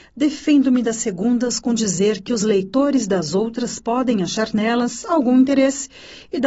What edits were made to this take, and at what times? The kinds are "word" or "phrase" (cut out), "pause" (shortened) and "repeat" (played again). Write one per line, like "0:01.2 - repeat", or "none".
none